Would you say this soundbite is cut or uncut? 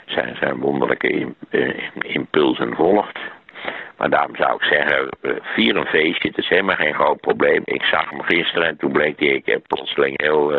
uncut